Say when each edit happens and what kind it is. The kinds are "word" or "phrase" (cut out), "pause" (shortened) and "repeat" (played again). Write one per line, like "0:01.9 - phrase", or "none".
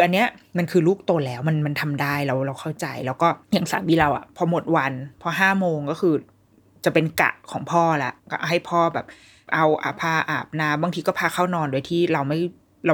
0:03.4 - pause
0:08.2 - pause